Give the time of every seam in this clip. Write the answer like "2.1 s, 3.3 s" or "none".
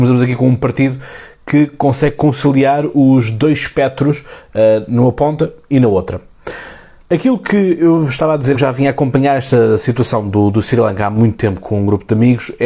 7.0 s, 8.5 s